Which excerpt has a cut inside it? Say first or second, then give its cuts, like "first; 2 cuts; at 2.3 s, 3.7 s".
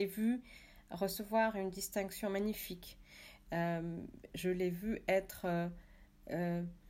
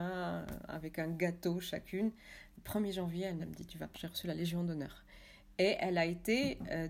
second; 2 cuts; at 3.4 s, 3.9 s